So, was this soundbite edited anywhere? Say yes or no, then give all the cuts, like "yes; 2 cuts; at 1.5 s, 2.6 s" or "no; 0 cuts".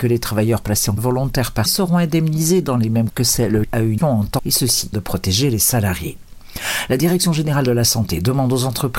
yes; 7 cuts; at 1.0 s, 1.7 s, 3.1 s, 3.6 s, 4.0 s, 4.4 s, 4.9 s